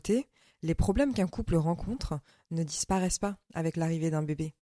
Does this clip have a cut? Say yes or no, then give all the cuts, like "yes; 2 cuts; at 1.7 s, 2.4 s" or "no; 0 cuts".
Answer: no; 0 cuts